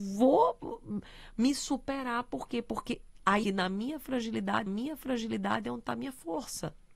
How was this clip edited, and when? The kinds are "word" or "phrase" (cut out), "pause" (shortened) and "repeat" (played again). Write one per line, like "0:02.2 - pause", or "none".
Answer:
0:03.4 - phrase
0:04.7 - repeat